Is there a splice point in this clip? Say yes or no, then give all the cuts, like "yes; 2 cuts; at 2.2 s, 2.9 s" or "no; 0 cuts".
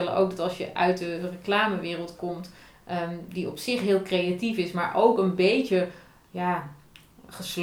no; 0 cuts